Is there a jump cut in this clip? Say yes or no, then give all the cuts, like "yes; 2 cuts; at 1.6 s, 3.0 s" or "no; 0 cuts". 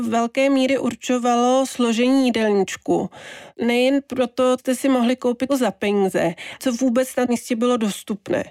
yes; 5 cuts; at 3.5 s, 4.6 s, 5.5 s, 6.6 s, 7.3 s